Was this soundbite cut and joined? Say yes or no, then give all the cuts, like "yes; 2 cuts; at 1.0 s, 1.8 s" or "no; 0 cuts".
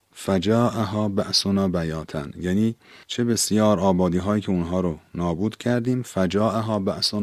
no; 0 cuts